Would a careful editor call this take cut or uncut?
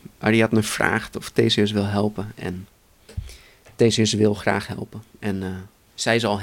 uncut